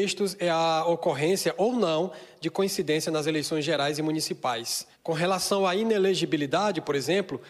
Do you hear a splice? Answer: yes; 1 cut; at 4.9 s

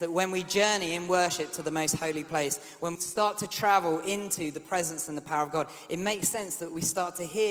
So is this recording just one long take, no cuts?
no; 1 cut; at 3.0 s

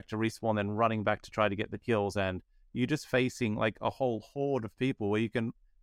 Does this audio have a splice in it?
no; 0 cuts

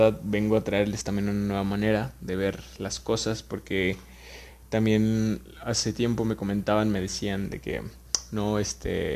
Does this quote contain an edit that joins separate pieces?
no; 0 cuts

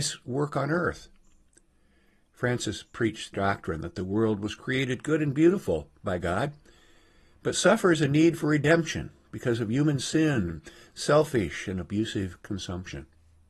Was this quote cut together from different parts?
yes; 1 cut; at 3.3 s

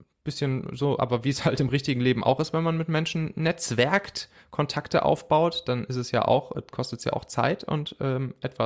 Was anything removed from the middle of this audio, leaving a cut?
no; 0 cuts

